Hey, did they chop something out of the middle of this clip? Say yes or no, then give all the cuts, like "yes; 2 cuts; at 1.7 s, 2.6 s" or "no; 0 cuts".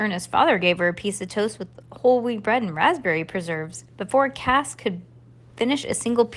yes; 1 cut; at 3.9 s